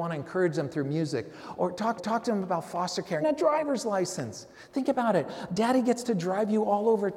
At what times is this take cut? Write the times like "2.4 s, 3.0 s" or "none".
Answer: 2.0 s, 3.2 s